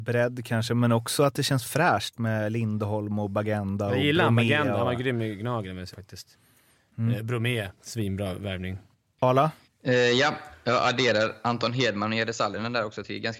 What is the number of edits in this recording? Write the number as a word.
three